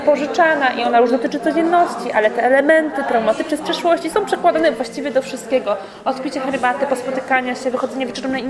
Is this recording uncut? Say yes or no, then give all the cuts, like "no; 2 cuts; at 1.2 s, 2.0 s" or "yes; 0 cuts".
yes; 0 cuts